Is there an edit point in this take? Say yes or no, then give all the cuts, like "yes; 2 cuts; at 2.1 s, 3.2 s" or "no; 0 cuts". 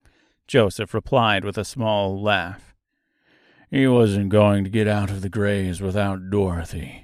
no; 0 cuts